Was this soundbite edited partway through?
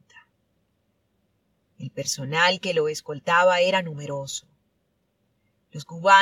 no; 0 cuts

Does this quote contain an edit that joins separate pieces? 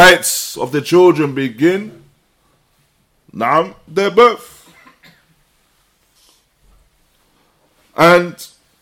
yes; 1 cut; at 3.9 s

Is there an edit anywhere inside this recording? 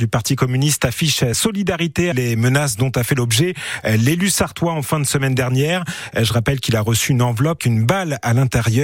yes; 3 cuts; at 1.3 s, 2.1 s, 7.6 s

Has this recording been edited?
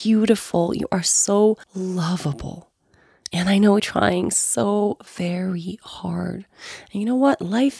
yes; 3 cuts; at 1.6 s, 3.8 s, 5.1 s

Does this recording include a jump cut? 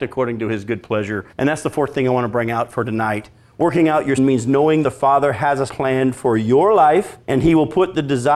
yes; 5 cuts; at 1.3 s, 4.2 s, 4.8 s, 5.7 s, 7.2 s

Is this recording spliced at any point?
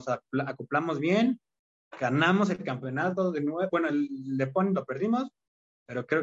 no; 0 cuts

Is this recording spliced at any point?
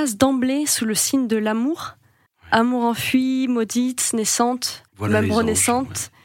yes; 2 cuts; at 2.3 s, 4.9 s

